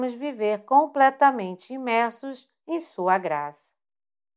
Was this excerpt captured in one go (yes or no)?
yes